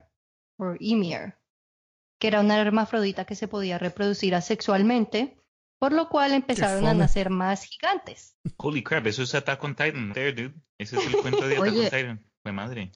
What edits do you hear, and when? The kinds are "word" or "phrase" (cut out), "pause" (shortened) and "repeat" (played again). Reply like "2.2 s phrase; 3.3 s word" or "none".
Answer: 10.1 s word